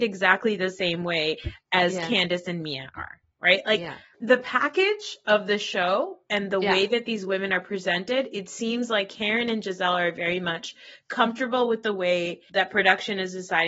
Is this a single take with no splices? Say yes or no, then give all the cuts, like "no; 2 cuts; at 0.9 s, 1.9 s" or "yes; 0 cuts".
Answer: yes; 0 cuts